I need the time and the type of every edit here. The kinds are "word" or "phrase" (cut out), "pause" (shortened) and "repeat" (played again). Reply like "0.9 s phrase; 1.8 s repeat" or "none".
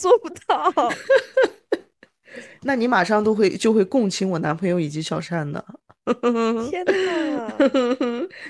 none